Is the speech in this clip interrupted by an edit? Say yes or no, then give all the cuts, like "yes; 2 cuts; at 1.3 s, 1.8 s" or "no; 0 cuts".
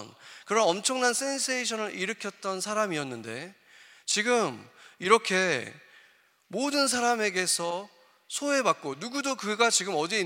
no; 0 cuts